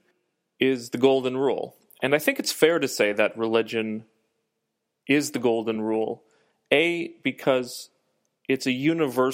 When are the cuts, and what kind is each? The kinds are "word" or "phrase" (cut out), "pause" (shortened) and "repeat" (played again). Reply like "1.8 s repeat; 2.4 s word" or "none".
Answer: none